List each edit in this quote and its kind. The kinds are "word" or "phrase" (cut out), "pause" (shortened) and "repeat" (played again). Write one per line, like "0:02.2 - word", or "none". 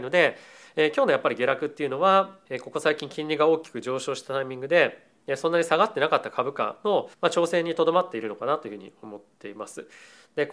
0:02.4 - pause
0:07.1 - pause

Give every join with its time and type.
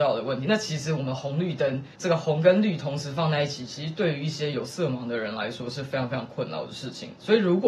0:01.9 - pause

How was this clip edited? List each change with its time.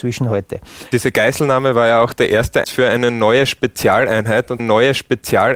0:02.6 - word
0:04.6 - repeat

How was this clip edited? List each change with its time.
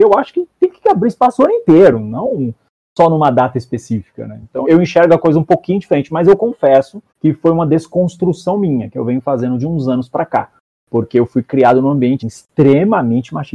0:04.6 - word
0:07.1 - pause
0:12.2 - word

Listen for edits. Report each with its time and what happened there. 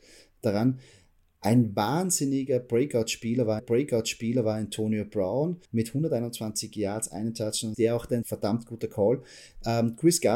0:03.6 - repeat
0:05.7 - pause
0:07.7 - phrase
0:08.2 - phrase

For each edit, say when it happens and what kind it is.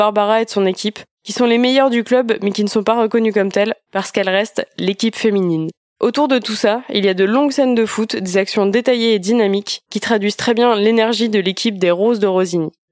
none

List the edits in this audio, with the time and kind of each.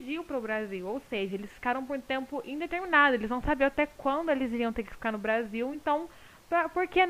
none

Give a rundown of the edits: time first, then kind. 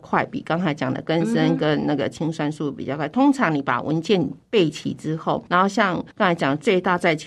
0:05.5 - word
0:06.1 - pause

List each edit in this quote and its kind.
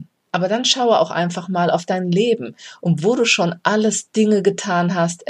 none

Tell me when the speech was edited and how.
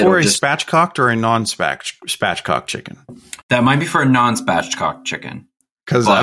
0:03.4 - pause

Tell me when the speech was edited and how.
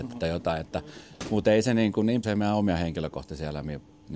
0:02.2 - phrase

